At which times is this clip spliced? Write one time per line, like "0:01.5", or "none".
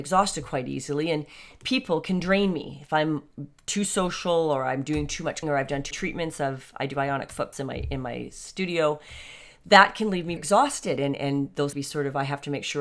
0:05.4
0:05.9
0:07.5
0:10.4
0:11.7